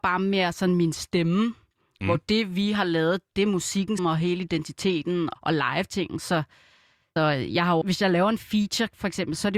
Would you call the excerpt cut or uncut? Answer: cut